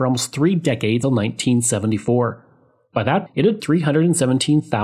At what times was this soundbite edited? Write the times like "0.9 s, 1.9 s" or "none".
1.0 s, 3.3 s, 3.6 s